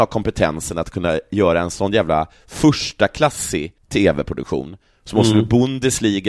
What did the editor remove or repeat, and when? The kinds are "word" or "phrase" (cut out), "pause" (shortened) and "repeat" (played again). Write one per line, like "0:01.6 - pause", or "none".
0:03.8 - pause